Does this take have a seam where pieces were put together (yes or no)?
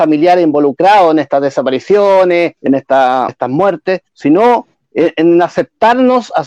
yes